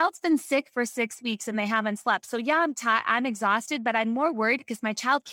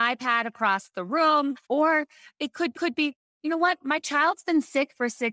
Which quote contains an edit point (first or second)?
second